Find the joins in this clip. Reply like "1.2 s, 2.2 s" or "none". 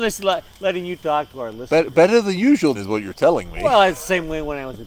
2.7 s